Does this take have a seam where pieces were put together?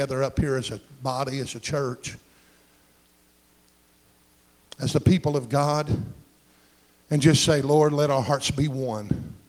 no; 0 cuts

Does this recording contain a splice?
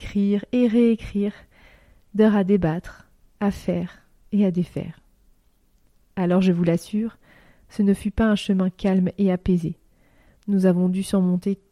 no; 0 cuts

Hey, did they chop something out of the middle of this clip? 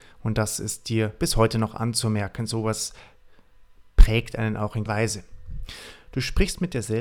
yes; 1 cut; at 4.9 s

